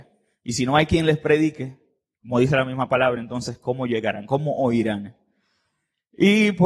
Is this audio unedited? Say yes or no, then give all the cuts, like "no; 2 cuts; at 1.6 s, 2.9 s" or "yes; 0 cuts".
yes; 0 cuts